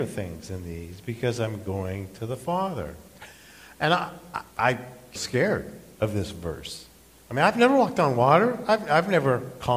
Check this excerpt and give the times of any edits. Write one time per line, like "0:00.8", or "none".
0:04.5
0:05.2